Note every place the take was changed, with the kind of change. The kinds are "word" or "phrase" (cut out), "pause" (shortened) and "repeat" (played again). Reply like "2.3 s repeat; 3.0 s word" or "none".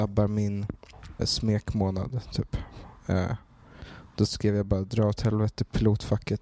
1.2 s word